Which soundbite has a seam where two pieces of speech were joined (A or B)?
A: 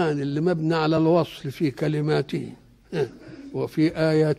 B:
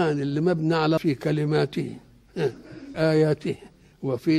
B